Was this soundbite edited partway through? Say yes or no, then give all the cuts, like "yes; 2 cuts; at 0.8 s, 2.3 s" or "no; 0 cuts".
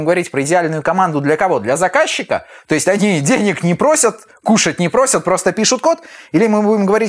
no; 0 cuts